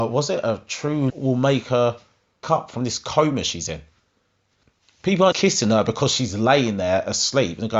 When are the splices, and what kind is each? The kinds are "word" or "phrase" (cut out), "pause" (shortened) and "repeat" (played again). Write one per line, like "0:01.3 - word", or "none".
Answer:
0:01.1 - word
0:02.4 - word
0:05.3 - word